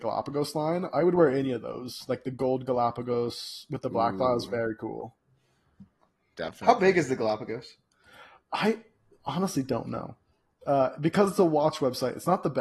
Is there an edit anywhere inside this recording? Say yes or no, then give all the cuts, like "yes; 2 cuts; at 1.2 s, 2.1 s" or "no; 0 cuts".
no; 0 cuts